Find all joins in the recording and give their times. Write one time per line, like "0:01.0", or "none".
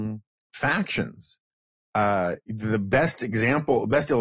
none